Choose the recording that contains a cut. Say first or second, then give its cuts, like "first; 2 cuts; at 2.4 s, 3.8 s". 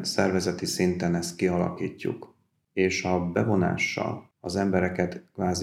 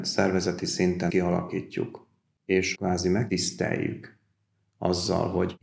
second; 2 cuts; at 1.1 s, 2.7 s